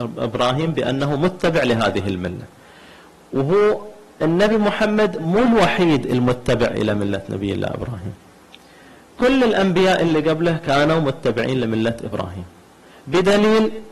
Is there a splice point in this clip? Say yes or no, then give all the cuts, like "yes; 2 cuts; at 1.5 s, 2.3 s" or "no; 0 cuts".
no; 0 cuts